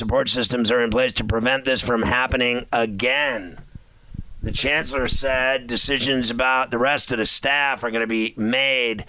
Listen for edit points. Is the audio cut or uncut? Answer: uncut